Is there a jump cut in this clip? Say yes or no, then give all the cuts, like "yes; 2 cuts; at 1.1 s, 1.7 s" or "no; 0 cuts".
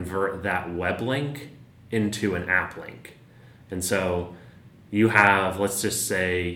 no; 0 cuts